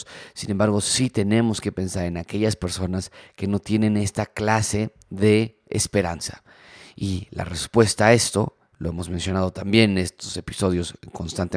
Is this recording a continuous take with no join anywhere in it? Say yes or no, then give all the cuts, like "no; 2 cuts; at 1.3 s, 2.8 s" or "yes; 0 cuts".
yes; 0 cuts